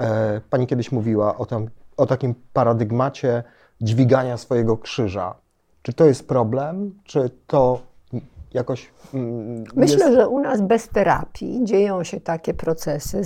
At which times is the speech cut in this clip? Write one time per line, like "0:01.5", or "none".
none